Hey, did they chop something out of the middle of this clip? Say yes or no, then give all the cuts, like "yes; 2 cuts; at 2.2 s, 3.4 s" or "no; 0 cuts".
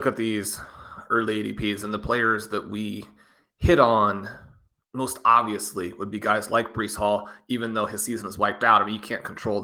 no; 0 cuts